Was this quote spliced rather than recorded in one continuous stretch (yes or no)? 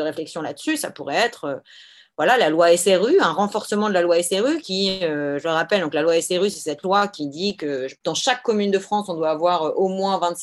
no